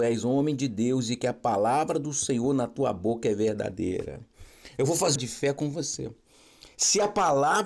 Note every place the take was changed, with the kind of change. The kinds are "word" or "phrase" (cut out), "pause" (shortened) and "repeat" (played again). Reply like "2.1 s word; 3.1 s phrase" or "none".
5.2 s phrase